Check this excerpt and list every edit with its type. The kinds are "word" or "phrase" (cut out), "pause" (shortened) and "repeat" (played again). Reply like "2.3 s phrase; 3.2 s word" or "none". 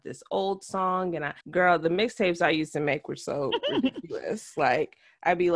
1.4 s pause